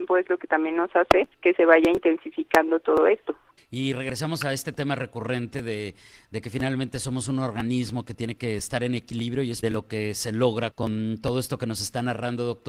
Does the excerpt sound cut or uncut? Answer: cut